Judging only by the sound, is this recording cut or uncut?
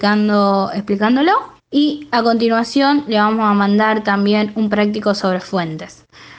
cut